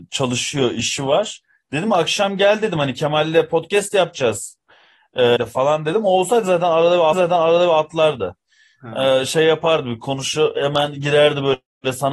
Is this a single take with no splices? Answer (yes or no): no